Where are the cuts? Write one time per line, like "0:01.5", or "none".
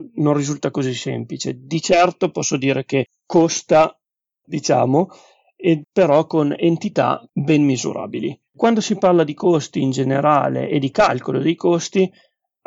0:04.4
0:05.8
0:07.3
0:08.5